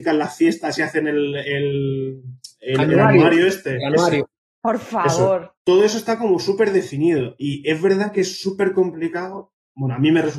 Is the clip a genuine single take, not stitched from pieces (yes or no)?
no